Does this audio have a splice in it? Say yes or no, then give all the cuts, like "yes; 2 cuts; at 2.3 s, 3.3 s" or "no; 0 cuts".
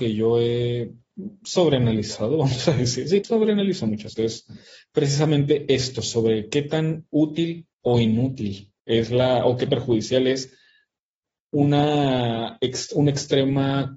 yes; 5 cuts; at 3.2 s, 4.2 s, 7.7 s, 8.8 s, 9.7 s